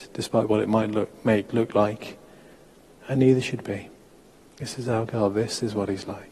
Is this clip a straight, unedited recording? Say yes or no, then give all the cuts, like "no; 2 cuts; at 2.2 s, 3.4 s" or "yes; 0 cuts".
no; 2 cuts; at 1.5 s, 3.6 s